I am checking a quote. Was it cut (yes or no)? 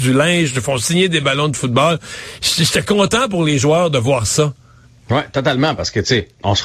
no